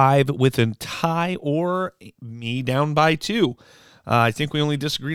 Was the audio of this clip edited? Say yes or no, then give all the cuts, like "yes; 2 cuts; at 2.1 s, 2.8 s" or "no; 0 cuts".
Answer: no; 0 cuts